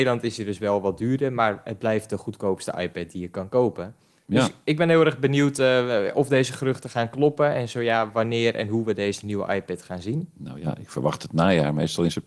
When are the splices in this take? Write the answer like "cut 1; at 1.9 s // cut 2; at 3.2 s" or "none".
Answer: none